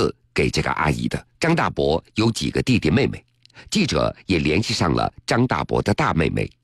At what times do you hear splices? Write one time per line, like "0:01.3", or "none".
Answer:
0:01.3